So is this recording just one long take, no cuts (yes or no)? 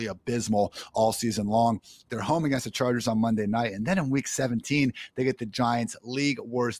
yes